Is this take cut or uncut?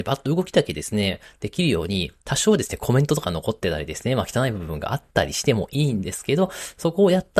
cut